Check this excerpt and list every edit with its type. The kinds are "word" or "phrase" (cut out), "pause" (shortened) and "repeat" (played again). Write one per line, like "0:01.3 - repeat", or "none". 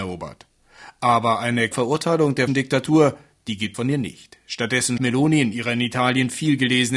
0:01.7 - word
0:02.5 - word
0:03.7 - word
0:05.0 - word